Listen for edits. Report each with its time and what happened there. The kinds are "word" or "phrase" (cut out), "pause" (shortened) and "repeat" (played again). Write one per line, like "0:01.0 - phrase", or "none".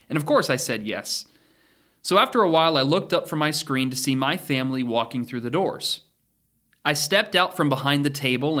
none